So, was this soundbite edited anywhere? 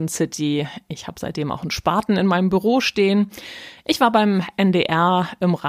no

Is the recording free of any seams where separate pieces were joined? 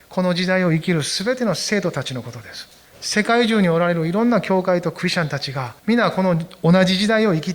no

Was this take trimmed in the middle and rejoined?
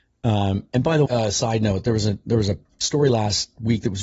yes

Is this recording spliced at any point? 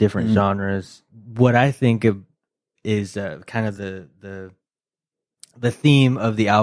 no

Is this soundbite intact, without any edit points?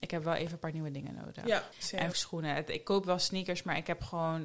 no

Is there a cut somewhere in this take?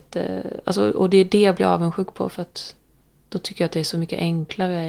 no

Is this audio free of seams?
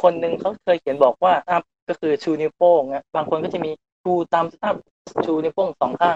no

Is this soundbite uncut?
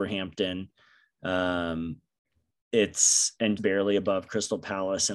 no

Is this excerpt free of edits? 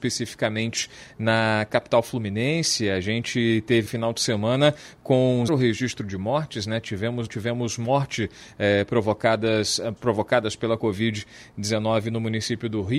no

